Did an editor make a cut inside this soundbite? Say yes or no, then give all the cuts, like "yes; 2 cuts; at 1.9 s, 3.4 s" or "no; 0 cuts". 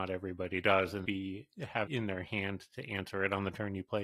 yes; 2 cuts; at 1.0 s, 1.9 s